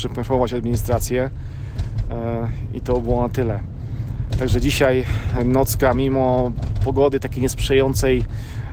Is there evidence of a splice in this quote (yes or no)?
no